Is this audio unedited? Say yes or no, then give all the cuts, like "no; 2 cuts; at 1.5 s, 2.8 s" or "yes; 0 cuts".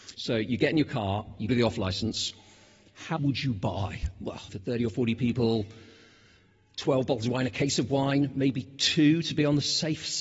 no; 3 cuts; at 1.5 s, 3.2 s, 4.5 s